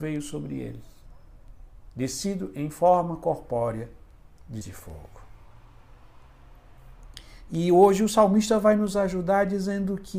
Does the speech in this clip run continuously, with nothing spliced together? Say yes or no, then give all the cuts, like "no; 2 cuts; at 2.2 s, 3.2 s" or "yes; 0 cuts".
no; 1 cut; at 4.6 s